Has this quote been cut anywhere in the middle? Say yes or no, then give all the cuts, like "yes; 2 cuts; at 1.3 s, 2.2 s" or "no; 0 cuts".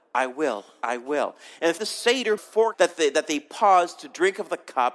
yes; 3 cuts; at 1.8 s, 2.4 s, 2.7 s